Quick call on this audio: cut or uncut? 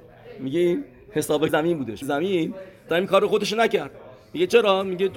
cut